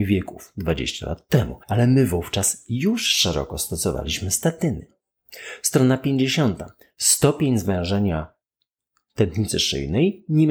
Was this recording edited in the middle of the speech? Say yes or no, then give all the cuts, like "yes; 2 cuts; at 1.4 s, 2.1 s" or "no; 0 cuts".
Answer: yes; 1 cut; at 1.6 s